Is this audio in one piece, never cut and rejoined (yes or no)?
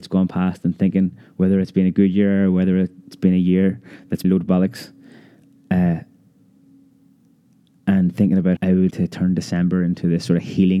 no